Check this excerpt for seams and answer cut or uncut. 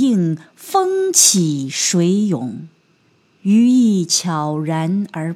cut